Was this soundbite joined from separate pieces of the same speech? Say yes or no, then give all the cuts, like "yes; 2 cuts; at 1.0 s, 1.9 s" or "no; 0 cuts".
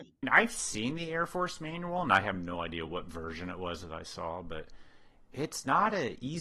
no; 0 cuts